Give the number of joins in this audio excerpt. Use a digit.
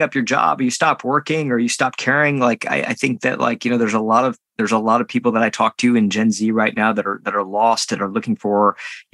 0